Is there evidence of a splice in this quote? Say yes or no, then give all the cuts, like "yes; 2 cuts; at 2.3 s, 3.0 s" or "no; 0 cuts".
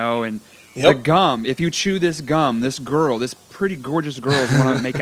no; 0 cuts